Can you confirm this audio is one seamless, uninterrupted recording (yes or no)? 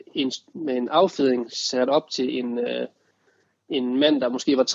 yes